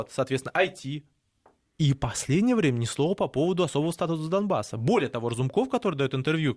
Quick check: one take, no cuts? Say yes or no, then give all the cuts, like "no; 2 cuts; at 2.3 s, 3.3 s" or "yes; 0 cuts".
yes; 0 cuts